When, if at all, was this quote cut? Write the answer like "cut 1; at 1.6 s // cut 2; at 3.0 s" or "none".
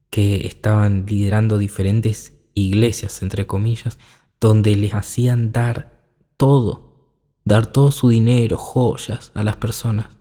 none